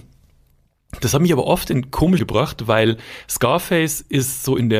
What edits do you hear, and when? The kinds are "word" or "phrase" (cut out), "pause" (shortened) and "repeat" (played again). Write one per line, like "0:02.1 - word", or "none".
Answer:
0:02.2 - word